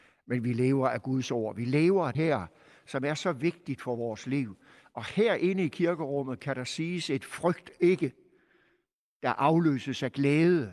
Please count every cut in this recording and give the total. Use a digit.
1